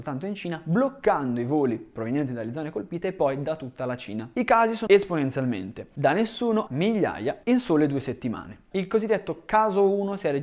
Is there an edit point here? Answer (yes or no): yes